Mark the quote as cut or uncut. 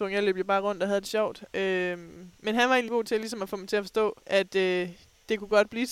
cut